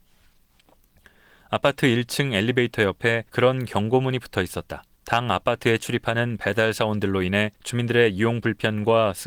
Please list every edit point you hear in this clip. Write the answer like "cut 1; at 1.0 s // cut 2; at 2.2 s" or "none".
cut 1; at 3.3 s // cut 2; at 4.9 s // cut 3; at 7.5 s

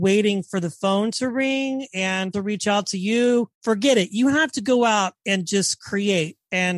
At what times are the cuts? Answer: cut 1; at 2.3 s // cut 2; at 3.5 s

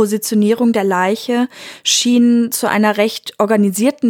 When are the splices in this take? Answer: none

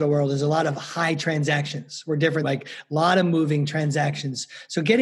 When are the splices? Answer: cut 1; at 2.4 s

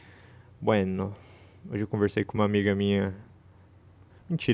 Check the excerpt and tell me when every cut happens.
none

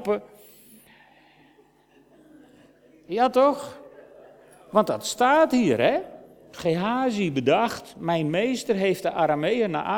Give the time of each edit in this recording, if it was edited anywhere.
none

